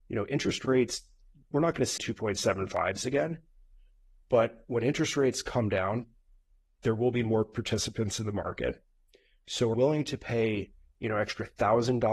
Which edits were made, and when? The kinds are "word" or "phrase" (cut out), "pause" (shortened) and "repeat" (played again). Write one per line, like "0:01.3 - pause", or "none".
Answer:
0:02.0 - word
0:09.7 - word